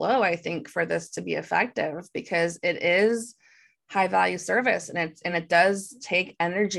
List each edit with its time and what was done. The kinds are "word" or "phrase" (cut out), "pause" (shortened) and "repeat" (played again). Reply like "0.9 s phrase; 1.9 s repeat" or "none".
none

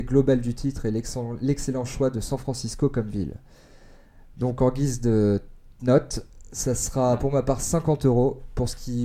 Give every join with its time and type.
none

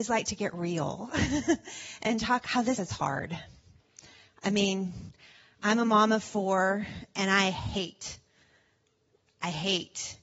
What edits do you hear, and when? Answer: 2.4 s word; 2.8 s word

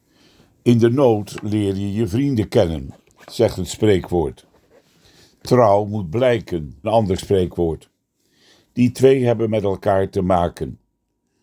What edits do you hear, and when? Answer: 6.8 s phrase

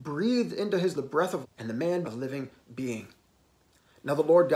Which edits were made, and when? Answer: 0.9 s word; 1.4 s word; 2.0 s word

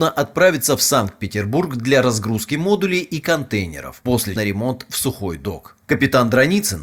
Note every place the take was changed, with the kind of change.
4.4 s phrase

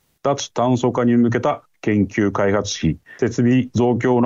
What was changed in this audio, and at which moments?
3.2 s pause

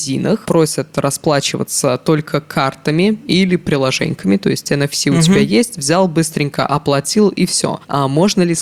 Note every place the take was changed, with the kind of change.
none

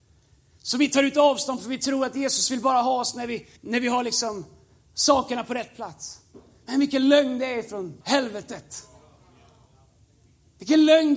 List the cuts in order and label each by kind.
3.6 s pause; 8.0 s pause

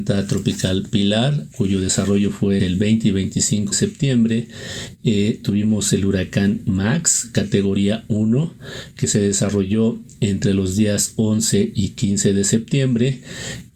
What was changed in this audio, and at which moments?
1.5 s word; 2.6 s word; 3.7 s word

